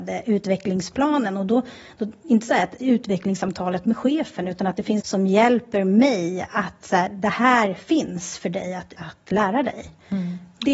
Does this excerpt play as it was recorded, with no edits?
no; 2 cuts; at 5.0 s, 8.9 s

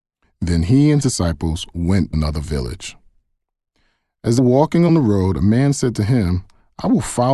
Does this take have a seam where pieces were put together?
yes; 4 cuts; at 1.0 s, 2.1 s, 4.4 s, 4.9 s

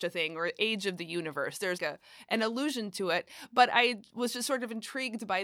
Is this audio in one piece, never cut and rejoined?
no; 1 cut; at 1.8 s

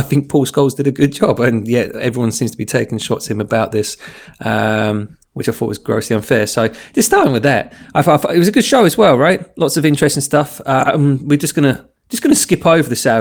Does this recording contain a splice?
yes; 2 cuts; at 5.2 s, 12.0 s

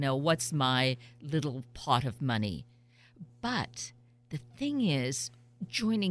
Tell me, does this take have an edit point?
no; 0 cuts

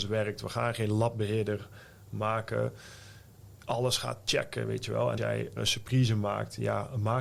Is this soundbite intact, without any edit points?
no; 3 cuts; at 3.6 s, 5.2 s, 5.6 s

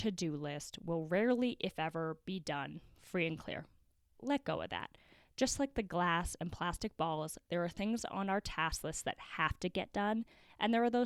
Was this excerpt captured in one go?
yes; 0 cuts

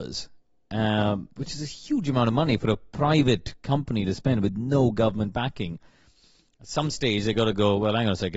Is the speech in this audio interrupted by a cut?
no; 0 cuts

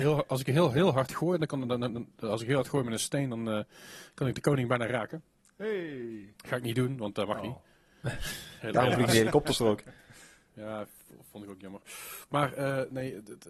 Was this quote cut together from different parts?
no; 0 cuts

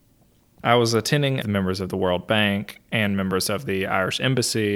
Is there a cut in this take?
yes; 1 cut; at 1.4 s

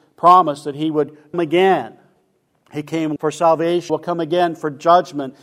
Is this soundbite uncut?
no; 3 cuts; at 1.3 s, 3.2 s, 3.9 s

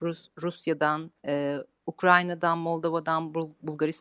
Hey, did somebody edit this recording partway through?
yes; 1 cut; at 1.2 s

